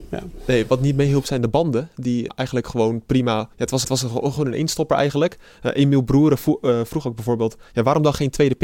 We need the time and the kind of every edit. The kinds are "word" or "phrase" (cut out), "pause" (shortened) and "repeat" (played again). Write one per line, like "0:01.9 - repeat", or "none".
0:02.3 - word
0:03.5 - pause
0:03.8 - repeat

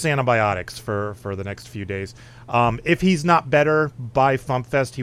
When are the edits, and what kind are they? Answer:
none

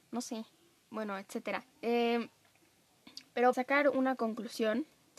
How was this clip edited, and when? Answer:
0:01.7 - pause
0:03.5 - word

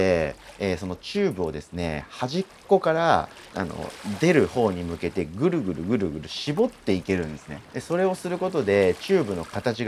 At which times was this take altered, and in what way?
0:03.5 - phrase
0:07.6 - pause

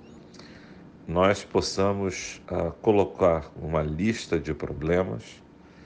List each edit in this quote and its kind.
0:02.4 - pause

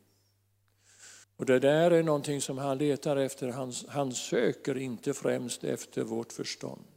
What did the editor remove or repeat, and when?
0:01.2 - pause

